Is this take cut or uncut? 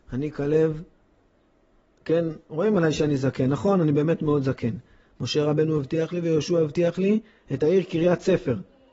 uncut